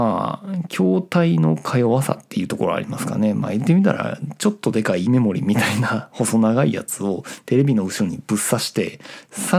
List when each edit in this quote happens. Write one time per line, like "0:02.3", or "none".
0:05.1